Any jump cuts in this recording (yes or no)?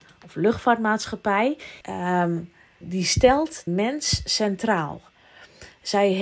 yes